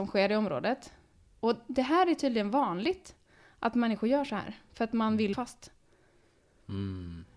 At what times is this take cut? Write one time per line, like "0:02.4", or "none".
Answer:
0:05.3